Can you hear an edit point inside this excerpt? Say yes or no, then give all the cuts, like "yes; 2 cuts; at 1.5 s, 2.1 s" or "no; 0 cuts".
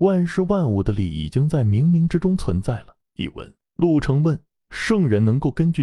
no; 0 cuts